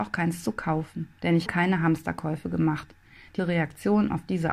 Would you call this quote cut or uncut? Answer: cut